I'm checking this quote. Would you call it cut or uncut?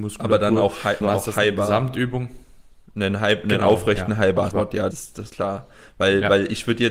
cut